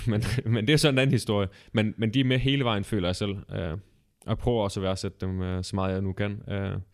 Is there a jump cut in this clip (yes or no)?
no